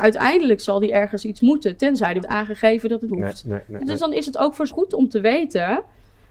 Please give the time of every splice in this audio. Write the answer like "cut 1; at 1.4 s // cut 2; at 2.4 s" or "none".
cut 1; at 2.2 s // cut 2; at 3.1 s // cut 3; at 3.8 s // cut 4; at 4.7 s